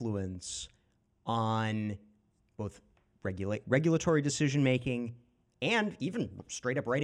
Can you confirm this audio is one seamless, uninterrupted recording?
yes; 0 cuts

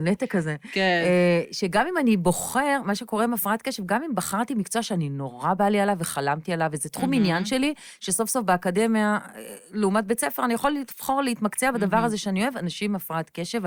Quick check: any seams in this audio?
no; 0 cuts

